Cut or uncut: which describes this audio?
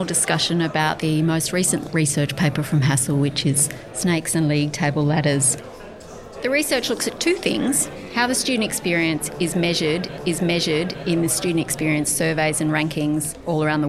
cut